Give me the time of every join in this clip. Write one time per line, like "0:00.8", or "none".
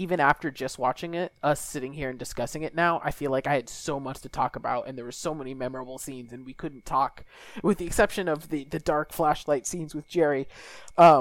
none